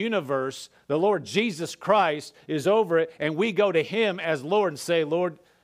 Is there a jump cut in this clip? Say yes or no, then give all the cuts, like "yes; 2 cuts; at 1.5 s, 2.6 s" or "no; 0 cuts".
no; 0 cuts